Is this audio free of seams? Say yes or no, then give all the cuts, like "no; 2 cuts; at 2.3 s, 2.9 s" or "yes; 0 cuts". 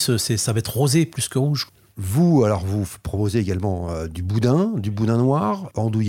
yes; 0 cuts